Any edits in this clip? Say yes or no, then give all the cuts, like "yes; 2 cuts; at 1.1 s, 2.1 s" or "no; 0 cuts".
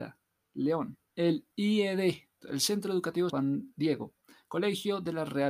yes; 3 cuts; at 1.1 s, 2.4 s, 3.3 s